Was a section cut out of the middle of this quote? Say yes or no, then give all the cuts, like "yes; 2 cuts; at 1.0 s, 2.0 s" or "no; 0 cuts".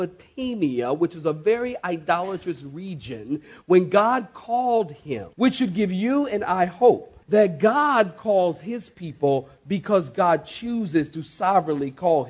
yes; 2 cuts; at 5.3 s, 7.2 s